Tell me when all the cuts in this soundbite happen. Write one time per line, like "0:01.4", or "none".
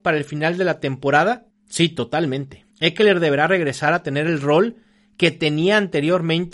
0:01.5
0:02.7